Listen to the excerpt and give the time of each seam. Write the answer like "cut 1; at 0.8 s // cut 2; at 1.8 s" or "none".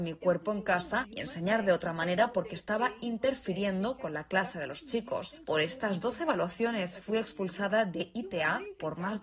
none

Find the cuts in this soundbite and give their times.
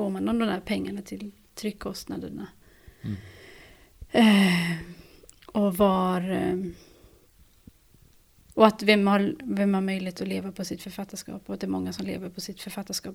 none

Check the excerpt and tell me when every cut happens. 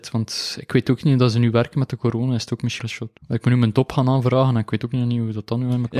cut 1; at 2.8 s // cut 2; at 3.2 s

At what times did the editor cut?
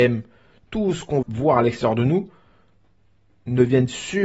cut 1; at 1.2 s

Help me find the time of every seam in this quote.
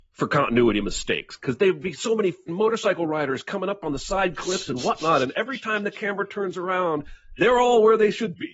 cut 1; at 2.5 s

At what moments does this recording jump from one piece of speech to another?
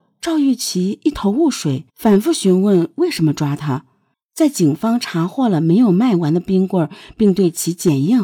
cut 1; at 1.9 s // cut 2; at 4.1 s

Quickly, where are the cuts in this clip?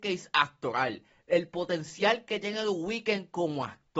none

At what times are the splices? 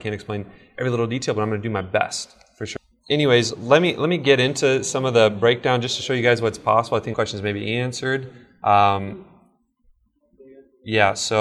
cut 1; at 7.1 s

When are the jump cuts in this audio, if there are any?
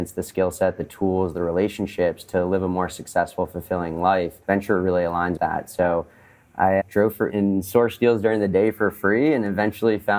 cut 1; at 4.4 s // cut 2; at 5.4 s // cut 3; at 6.8 s // cut 4; at 7.3 s

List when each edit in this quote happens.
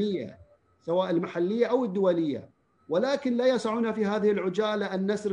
cut 1; at 2.8 s

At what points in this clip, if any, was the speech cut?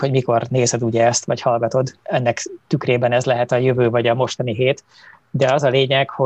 cut 1; at 2.0 s

